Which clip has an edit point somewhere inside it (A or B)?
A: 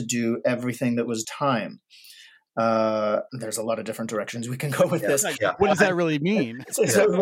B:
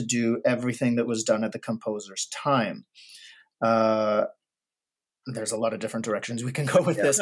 A